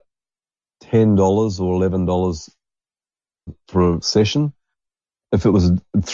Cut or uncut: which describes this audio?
cut